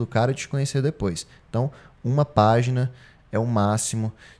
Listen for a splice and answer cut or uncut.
uncut